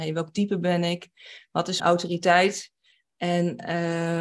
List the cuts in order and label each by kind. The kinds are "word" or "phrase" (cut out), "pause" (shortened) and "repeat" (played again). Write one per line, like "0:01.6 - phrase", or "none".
0:01.8 - phrase